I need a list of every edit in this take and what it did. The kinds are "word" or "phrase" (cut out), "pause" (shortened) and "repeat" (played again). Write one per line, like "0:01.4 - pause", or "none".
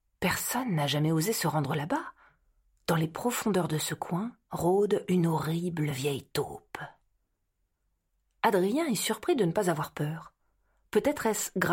none